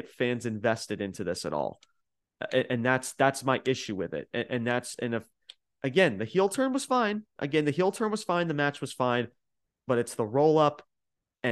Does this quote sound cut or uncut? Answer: uncut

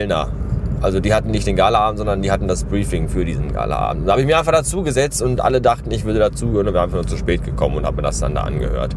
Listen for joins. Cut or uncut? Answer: uncut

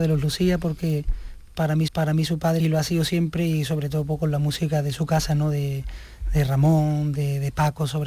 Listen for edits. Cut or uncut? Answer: cut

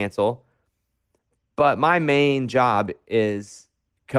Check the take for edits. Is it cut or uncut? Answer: uncut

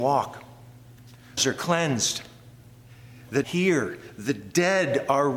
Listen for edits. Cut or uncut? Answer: cut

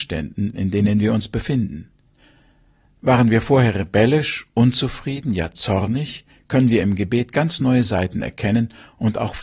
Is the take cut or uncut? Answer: uncut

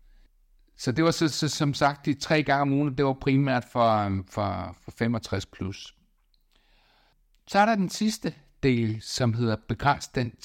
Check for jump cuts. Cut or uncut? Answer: uncut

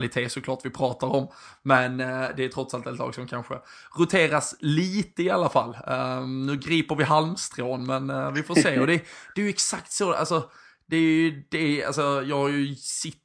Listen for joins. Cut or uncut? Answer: uncut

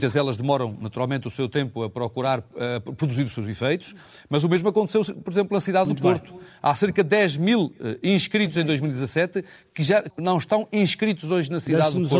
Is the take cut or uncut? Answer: cut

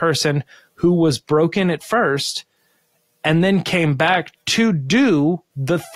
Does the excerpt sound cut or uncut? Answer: uncut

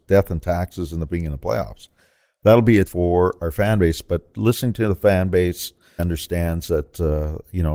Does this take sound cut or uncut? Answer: cut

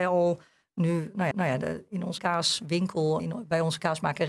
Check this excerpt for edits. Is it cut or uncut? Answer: cut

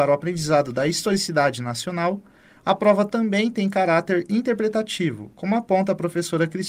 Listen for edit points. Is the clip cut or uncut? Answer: uncut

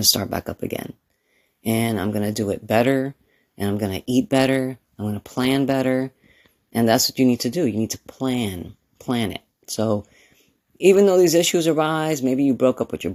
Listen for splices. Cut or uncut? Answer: uncut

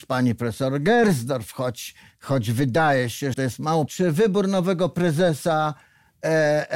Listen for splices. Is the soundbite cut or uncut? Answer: cut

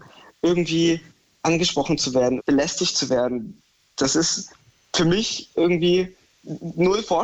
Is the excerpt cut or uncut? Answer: cut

